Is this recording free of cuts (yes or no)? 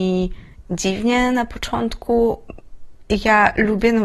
yes